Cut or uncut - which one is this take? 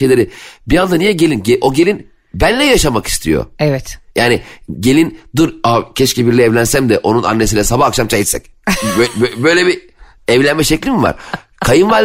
uncut